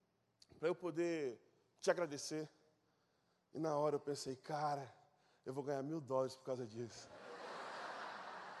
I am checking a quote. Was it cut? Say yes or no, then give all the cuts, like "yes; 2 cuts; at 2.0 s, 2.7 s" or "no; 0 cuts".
no; 0 cuts